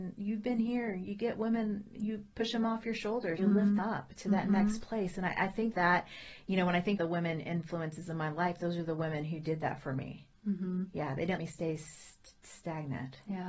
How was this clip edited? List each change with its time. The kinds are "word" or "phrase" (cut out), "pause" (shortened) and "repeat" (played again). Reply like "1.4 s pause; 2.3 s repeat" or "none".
3.4 s word; 3.8 s word; 5.7 s word; 7.0 s word; 11.4 s word